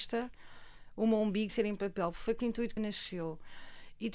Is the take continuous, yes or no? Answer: no